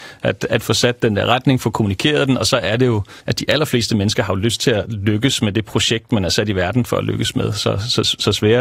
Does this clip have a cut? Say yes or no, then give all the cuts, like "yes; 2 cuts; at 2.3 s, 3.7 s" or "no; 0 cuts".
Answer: yes; 1 cut; at 3.2 s